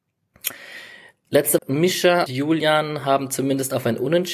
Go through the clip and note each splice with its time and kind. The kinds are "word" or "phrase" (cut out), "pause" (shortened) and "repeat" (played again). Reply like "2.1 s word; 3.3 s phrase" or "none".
1.6 s word; 2.3 s word

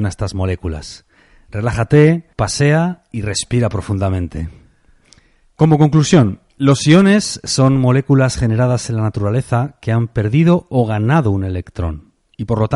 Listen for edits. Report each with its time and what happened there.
2.3 s pause; 6.5 s pause

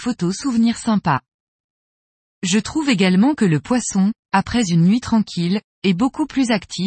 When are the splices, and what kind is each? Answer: none

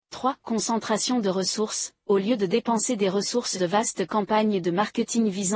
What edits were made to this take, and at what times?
3.6 s word

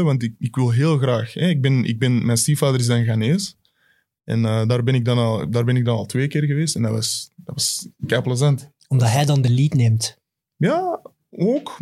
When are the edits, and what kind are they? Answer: none

